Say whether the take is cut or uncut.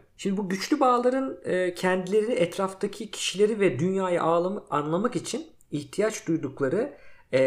uncut